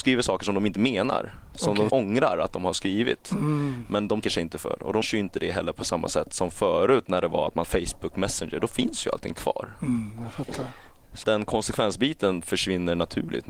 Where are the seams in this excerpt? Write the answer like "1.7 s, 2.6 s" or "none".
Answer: 1.9 s, 4.2 s, 5.0 s, 7.6 s, 11.2 s